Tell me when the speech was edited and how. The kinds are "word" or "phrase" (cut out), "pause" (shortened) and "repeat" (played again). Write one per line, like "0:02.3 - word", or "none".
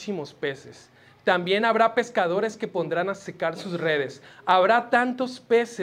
none